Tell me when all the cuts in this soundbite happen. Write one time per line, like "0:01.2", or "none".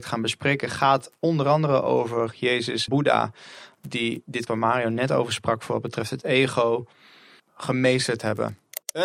0:02.9
0:04.5
0:07.4